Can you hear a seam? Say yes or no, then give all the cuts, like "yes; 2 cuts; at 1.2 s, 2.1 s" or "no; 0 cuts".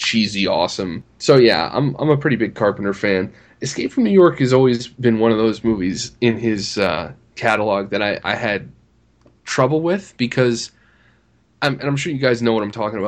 no; 0 cuts